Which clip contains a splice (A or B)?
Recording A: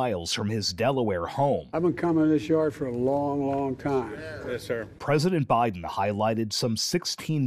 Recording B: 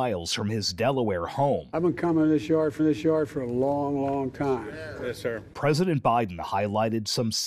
B